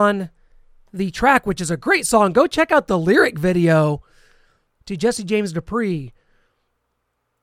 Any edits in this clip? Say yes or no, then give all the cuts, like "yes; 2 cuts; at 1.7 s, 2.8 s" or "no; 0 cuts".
no; 0 cuts